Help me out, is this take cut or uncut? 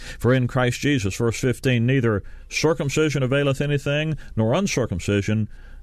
uncut